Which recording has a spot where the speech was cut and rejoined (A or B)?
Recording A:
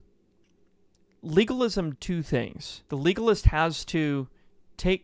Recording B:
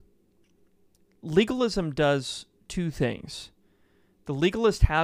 A